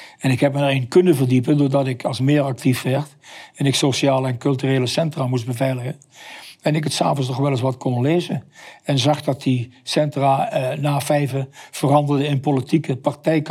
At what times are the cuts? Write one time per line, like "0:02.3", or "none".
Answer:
0:02.2